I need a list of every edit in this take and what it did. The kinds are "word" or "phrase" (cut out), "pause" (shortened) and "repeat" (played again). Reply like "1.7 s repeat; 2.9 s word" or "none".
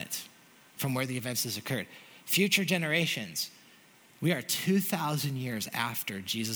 none

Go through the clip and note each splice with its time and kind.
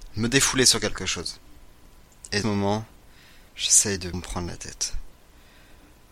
2.4 s phrase; 3.5 s pause; 4.1 s word

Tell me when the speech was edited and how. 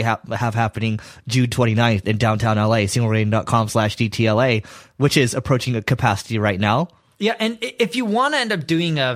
none

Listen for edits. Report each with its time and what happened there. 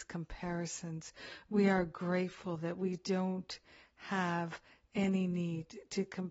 none

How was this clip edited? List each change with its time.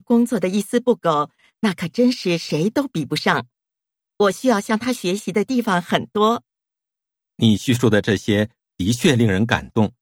none

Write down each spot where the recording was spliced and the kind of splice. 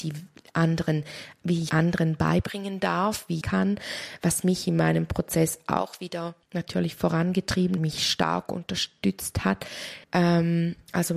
1.7 s word; 3.4 s phrase; 6.4 s pause; 7.8 s phrase; 10.0 s pause

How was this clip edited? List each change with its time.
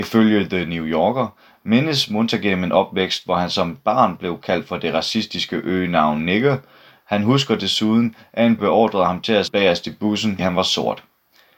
8.6 s word; 9.5 s word; 10.4 s word

